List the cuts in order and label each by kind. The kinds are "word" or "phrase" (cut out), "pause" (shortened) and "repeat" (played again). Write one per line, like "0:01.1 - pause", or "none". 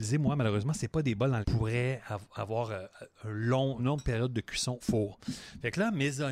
0:01.4 - phrase
0:03.8 - phrase
0:04.8 - word

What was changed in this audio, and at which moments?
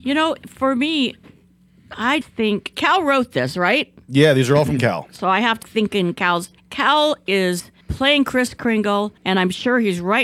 0:02.2 - word
0:02.7 - word
0:05.6 - word
0:06.6 - pause
0:07.8 - pause
0:09.2 - pause

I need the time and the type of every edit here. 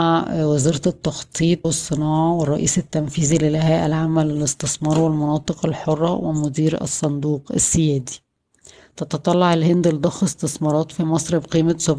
0:01.6 - word

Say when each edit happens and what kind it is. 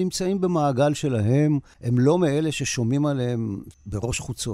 none

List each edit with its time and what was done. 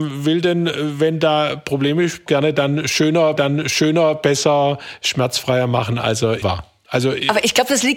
0:02.3 - phrase
0:03.4 - repeat
0:06.4 - word

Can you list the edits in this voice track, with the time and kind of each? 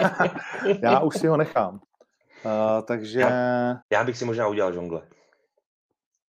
0:03.8 - pause

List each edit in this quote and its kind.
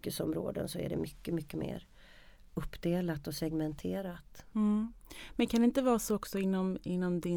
none

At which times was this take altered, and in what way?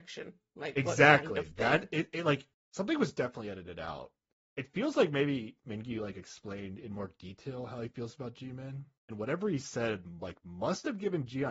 none

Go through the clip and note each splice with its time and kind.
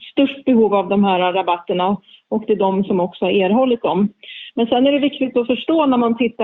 none

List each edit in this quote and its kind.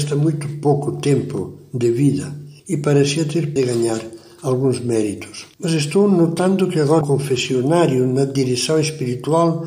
0:02.6 - pause
0:03.6 - phrase
0:05.5 - pause
0:07.0 - word

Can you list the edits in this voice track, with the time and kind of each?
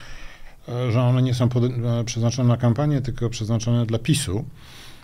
none

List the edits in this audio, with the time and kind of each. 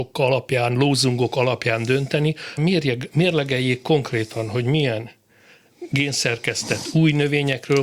0:02.6 - word

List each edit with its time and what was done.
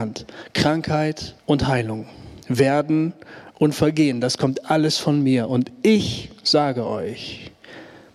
0:01.4 - pause
0:02.4 - pause

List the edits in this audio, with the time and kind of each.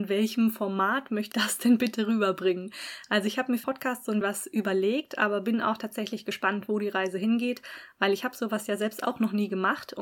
0:01.3 - word
0:03.6 - word
0:04.2 - word

